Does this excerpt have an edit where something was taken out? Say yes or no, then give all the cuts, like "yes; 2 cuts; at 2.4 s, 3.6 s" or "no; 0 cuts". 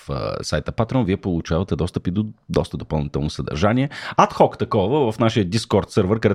no; 0 cuts